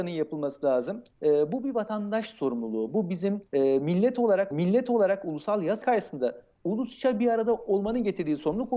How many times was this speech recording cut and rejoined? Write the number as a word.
four